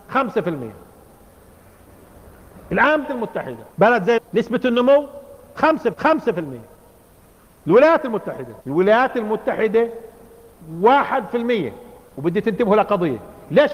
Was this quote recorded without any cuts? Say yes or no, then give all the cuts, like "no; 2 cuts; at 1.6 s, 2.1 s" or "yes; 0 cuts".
no; 5 cuts; at 3.0 s, 3.7 s, 4.2 s, 5.9 s, 8.6 s